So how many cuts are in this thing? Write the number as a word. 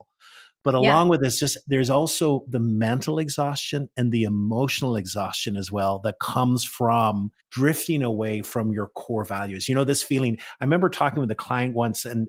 one